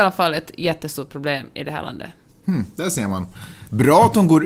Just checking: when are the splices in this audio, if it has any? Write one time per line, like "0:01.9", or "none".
none